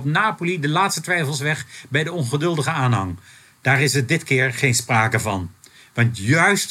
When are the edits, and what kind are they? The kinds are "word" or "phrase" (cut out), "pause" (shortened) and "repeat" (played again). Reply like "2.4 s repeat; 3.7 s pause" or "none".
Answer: none